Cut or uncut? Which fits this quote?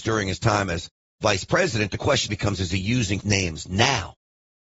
cut